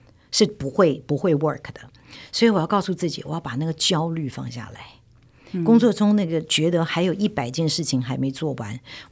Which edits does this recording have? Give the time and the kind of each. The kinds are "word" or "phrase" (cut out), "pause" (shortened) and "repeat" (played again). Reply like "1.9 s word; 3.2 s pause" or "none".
none